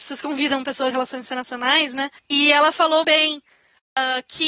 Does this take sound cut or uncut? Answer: cut